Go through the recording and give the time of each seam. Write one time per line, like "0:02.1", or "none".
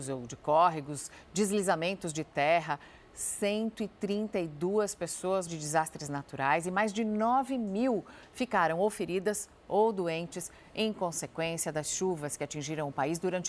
0:05.5